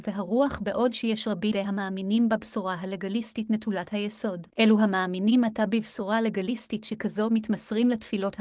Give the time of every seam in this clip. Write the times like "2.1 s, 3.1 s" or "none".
1.5 s, 4.5 s